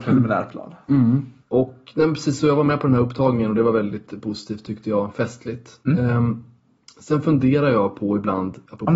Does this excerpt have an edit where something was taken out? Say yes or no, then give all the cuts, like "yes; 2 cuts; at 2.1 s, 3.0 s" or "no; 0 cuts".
yes; 2 cuts; at 1.4 s, 5.8 s